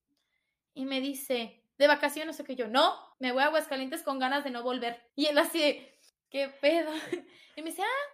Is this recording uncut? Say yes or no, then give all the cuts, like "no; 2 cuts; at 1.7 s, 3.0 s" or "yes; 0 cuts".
no; 3 cuts; at 3.1 s, 5.1 s, 6.1 s